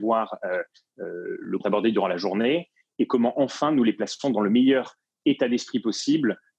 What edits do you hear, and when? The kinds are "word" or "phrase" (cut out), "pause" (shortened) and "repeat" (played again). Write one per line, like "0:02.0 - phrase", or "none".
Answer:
0:01.6 - phrase